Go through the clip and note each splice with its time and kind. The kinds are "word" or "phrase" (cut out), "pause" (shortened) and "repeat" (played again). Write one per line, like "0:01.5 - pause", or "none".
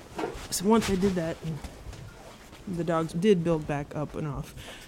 none